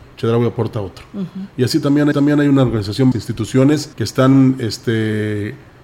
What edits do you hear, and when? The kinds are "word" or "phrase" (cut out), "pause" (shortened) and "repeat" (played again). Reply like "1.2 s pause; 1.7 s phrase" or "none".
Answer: 2.1 s repeat; 3.1 s phrase; 3.9 s pause